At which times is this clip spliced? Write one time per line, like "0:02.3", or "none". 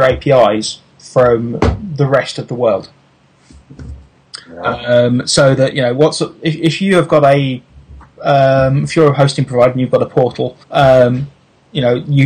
0:00.9
0:04.4
0:10.6